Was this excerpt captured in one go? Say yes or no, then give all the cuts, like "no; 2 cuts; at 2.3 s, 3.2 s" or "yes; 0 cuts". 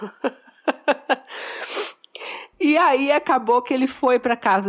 yes; 0 cuts